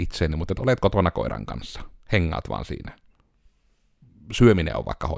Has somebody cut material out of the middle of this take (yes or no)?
no